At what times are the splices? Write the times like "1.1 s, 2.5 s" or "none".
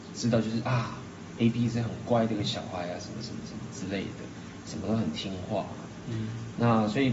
none